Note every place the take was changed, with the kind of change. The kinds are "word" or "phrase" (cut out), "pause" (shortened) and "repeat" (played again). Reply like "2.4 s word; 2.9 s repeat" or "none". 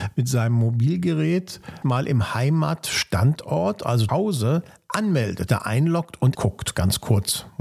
1.8 s word; 4.1 s word; 5.5 s word; 6.3 s word